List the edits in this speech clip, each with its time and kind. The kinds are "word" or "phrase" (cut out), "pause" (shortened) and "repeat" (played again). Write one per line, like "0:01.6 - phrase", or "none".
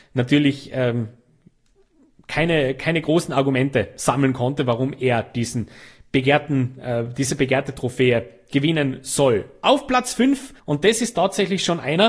0:10.6 - pause